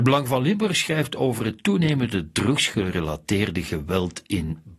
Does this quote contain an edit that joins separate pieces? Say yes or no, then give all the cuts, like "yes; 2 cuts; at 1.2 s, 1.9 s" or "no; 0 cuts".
no; 0 cuts